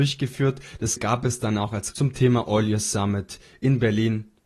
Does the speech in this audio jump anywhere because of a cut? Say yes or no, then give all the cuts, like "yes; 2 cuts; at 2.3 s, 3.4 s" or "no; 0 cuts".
yes; 2 cuts; at 1.0 s, 1.9 s